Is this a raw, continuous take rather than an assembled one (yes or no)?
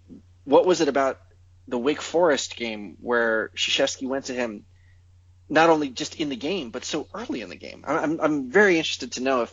yes